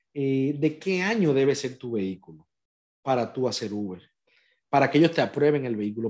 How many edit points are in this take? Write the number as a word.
zero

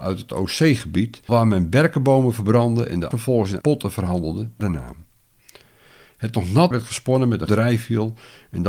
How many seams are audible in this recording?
six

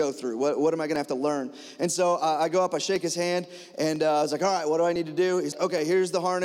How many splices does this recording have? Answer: one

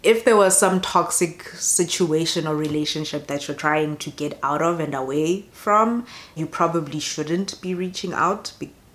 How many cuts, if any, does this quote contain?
one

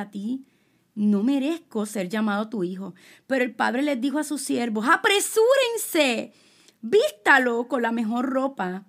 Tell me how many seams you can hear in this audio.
zero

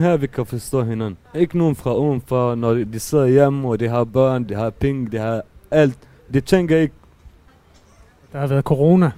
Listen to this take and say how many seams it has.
one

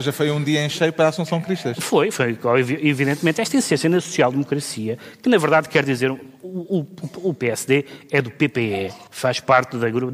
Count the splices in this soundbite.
one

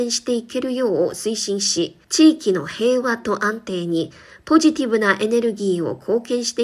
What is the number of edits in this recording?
one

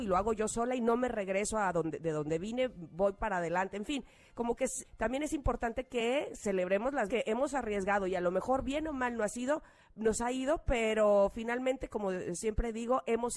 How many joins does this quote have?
two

